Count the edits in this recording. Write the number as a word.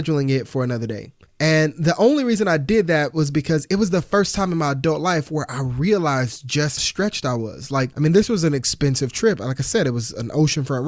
two